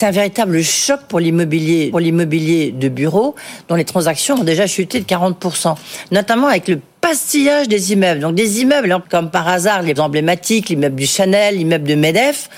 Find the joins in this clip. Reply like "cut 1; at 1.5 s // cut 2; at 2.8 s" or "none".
cut 1; at 1.9 s // cut 2; at 9.0 s // cut 3; at 10.0 s